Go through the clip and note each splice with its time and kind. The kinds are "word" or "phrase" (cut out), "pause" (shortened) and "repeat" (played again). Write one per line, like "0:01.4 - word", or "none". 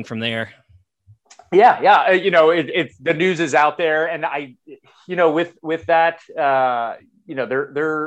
none